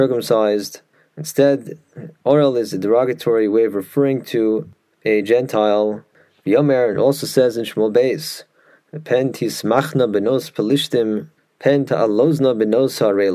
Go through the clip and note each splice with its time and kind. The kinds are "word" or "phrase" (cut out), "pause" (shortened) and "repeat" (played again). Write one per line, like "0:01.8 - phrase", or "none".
none